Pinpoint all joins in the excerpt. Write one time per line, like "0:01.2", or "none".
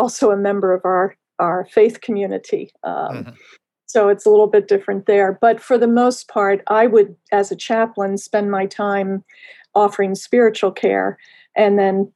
none